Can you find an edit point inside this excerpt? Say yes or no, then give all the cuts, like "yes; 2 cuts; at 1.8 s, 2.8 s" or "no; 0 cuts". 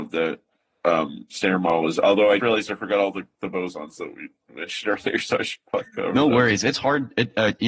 yes; 1 cut; at 2.4 s